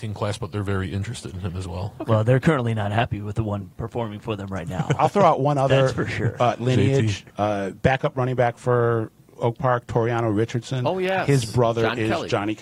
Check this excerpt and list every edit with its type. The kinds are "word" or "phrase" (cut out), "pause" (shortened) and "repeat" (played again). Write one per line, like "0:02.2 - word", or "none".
0:07.3 - pause

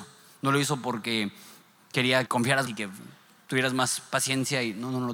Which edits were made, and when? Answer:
0:02.3 - word
0:02.7 - word

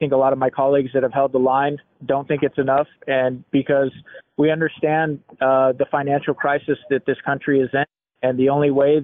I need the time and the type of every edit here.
none

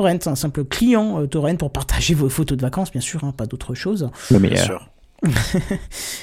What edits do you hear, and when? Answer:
none

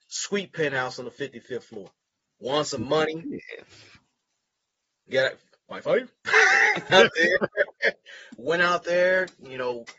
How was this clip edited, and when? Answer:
0:02.1 - pause
0:06.9 - word

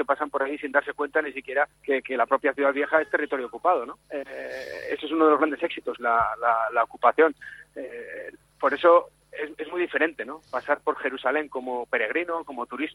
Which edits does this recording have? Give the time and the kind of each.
0:01.7 - pause
0:04.0 - pause
0:06.0 - phrase
0:09.2 - pause

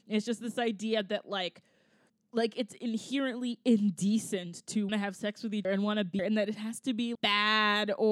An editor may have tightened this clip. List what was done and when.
0:02.1 - pause
0:04.9 - word
0:05.6 - word
0:06.2 - phrase
0:07.1 - word

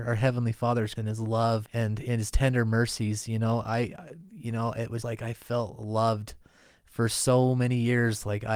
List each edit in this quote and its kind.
0:01.0 - word
0:01.7 - word
0:05.0 - word

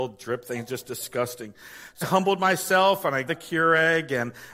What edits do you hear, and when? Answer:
0:02.0 - word
0:03.3 - word

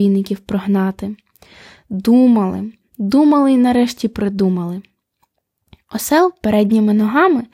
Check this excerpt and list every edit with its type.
none

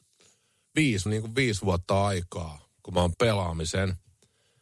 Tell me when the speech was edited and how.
0:01.1 - phrase
0:03.1 - word

